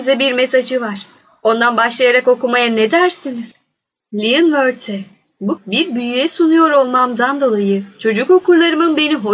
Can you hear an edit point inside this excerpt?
yes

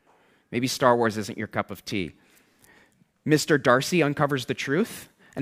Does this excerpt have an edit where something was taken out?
no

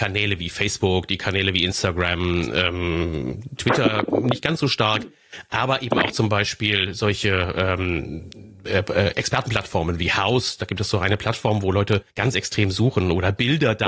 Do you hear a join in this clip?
yes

